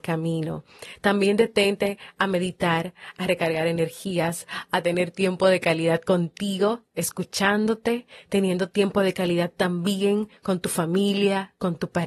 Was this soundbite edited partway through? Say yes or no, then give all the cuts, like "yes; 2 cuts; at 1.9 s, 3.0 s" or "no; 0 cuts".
no; 0 cuts